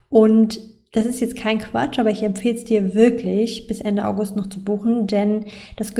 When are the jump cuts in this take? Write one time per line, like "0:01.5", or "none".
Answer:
none